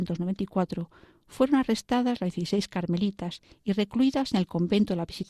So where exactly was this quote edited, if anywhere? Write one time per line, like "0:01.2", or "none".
none